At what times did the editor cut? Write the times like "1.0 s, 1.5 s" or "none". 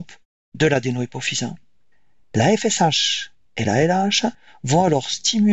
none